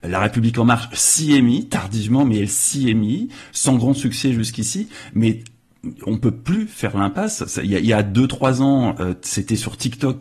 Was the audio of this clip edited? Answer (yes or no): no